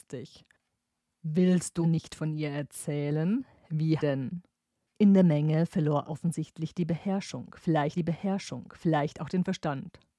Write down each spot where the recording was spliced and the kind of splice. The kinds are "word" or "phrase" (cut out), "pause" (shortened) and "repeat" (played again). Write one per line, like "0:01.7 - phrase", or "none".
0:01.8 - phrase
0:04.0 - phrase
0:06.1 - word
0:07.9 - repeat